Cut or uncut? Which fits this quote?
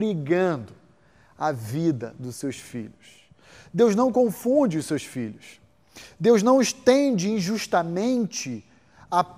uncut